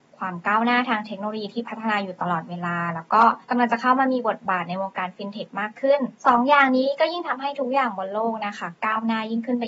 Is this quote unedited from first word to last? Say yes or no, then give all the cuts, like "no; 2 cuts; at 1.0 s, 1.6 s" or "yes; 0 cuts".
no; 2 cuts; at 3.4 s, 6.2 s